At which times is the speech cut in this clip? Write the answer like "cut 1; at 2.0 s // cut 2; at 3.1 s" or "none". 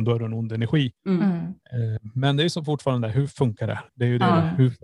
cut 1; at 1.0 s // cut 2; at 3.9 s